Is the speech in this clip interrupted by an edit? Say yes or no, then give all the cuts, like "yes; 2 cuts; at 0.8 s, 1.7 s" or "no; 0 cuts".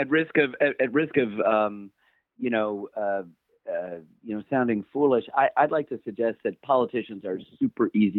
no; 0 cuts